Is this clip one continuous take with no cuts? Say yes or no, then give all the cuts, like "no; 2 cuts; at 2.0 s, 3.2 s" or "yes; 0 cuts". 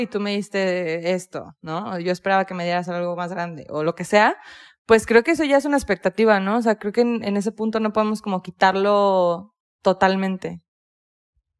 yes; 0 cuts